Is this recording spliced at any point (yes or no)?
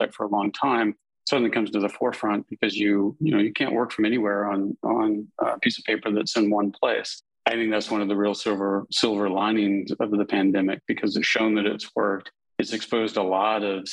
no